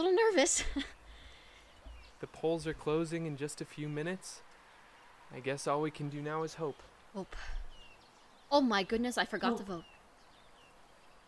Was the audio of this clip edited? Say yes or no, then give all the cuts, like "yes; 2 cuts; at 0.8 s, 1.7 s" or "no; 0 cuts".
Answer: no; 0 cuts